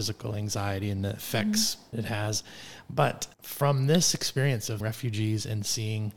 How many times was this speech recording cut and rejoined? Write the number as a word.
three